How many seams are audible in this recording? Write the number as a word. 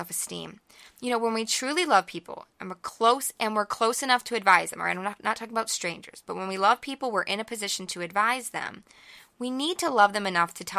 zero